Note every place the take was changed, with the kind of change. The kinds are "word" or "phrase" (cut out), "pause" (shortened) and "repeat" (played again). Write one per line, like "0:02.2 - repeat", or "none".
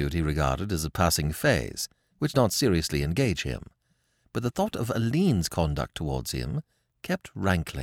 0:02.3 - word